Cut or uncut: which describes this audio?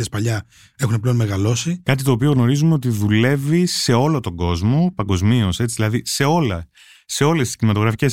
uncut